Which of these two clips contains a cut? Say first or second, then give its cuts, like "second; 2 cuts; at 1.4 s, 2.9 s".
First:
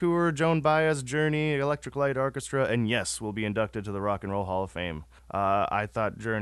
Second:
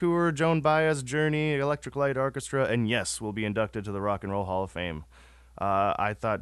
first; 1 cut; at 5.2 s